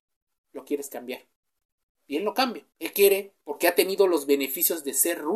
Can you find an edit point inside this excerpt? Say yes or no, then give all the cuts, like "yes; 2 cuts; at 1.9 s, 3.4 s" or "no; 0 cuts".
yes; 2 cuts; at 1.6 s, 2.7 s